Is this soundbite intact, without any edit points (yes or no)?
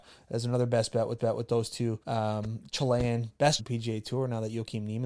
no